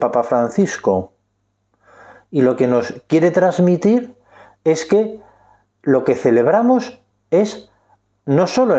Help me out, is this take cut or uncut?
uncut